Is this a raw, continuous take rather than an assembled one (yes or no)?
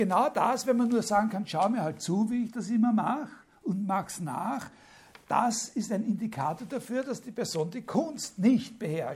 yes